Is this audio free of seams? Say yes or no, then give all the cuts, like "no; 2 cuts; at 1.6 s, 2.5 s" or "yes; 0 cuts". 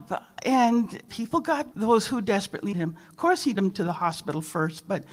no; 4 cuts; at 1.1 s, 1.7 s, 2.7 s, 3.6 s